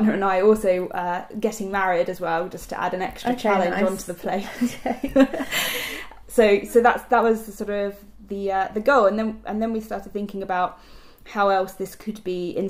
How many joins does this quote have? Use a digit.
0